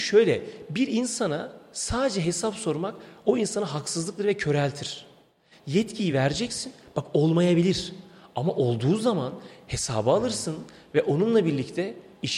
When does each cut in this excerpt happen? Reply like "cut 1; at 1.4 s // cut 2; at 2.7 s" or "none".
none